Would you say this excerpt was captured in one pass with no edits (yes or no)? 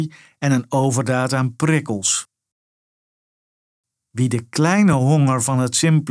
yes